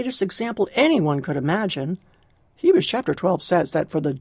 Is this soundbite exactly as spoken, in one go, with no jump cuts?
yes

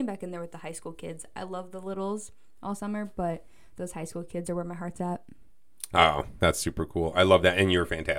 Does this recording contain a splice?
no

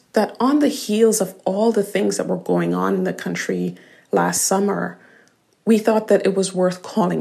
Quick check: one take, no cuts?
yes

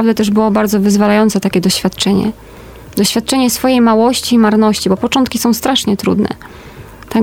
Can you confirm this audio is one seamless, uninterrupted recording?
yes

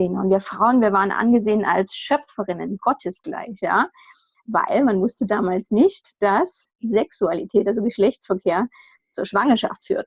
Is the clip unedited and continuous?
yes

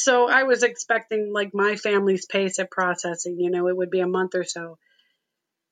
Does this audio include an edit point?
no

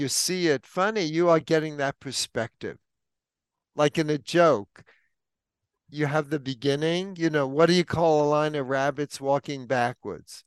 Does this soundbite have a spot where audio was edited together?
no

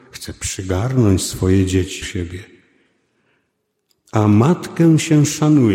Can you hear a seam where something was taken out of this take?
yes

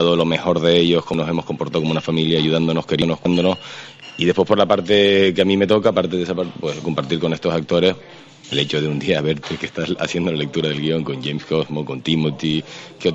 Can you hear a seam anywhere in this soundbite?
yes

